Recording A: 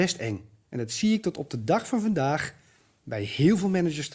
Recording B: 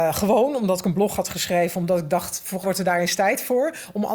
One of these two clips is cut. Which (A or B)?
B